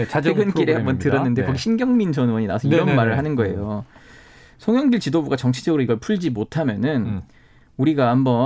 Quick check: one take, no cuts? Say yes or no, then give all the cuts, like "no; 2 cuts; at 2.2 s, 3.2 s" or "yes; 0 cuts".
yes; 0 cuts